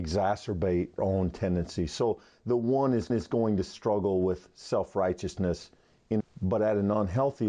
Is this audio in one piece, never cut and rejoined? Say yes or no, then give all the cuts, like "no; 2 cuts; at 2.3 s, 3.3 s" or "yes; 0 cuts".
no; 3 cuts; at 1.0 s, 3.1 s, 6.2 s